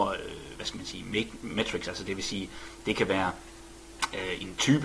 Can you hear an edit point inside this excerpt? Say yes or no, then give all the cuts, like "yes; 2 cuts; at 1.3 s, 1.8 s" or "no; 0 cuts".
no; 0 cuts